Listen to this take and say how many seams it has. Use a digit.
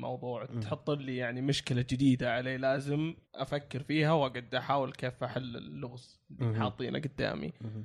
1